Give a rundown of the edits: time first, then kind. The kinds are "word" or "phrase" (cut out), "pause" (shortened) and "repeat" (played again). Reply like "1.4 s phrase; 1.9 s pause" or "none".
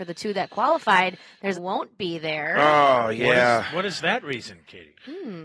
1.5 s phrase